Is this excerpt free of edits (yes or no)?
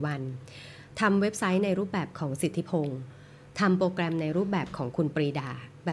yes